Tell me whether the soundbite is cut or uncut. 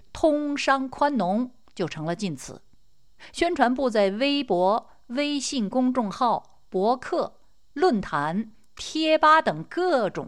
uncut